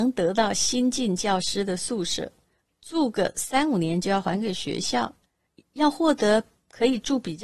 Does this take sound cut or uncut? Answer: uncut